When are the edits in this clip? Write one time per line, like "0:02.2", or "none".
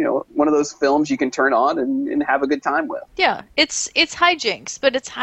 0:03.1